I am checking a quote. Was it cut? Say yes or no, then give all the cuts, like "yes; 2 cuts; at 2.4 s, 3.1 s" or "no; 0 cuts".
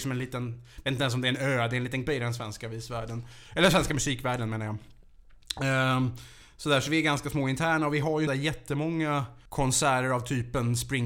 yes; 3 cuts; at 2.1 s, 8.3 s, 9.5 s